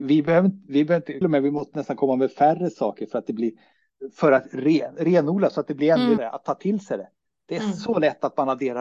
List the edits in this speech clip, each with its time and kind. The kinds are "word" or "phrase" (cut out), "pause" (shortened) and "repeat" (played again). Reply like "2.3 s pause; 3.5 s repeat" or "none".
1.2 s phrase; 6.2 s word

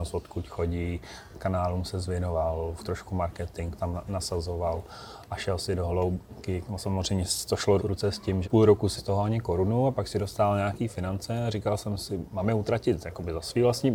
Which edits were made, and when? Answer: 1.3 s word; 2.8 s word; 3.8 s word; 7.8 s word; 8.4 s word; 9.0 s word

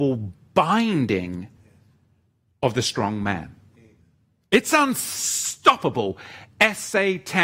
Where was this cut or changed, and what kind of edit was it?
none

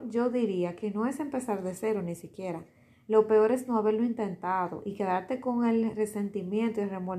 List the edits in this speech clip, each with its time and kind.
none

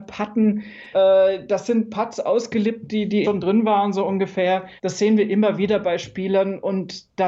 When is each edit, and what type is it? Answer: 0.9 s word; 3.2 s word; 4.8 s pause

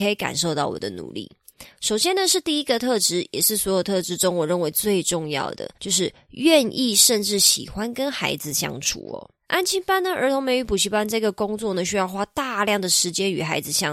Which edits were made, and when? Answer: 5.7 s pause; 9.4 s pause

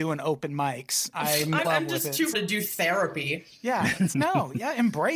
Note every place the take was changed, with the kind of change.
1.1 s word; 1.6 s word; 2.3 s word; 4.1 s word

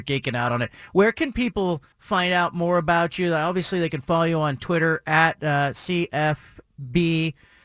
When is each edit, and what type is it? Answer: 1.9 s pause

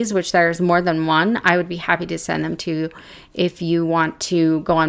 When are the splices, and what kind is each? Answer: none

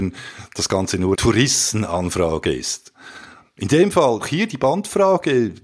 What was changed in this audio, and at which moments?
1.1 s word; 4.2 s phrase

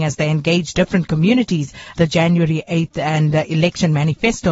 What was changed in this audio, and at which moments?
2.0 s phrase

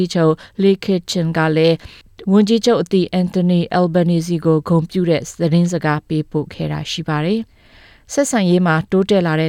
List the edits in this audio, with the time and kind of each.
7.5 s pause

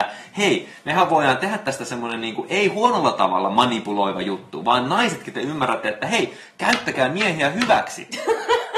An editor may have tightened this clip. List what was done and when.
none

